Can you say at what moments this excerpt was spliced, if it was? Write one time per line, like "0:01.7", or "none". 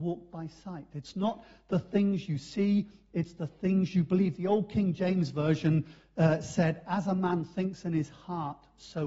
none